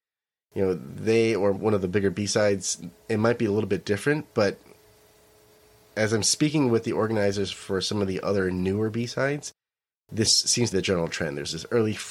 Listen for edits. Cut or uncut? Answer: cut